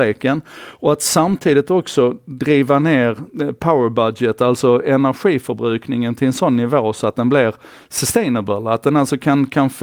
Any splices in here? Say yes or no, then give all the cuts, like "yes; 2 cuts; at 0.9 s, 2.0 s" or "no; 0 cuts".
no; 0 cuts